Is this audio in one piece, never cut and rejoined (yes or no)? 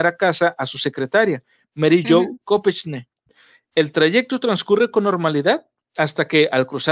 yes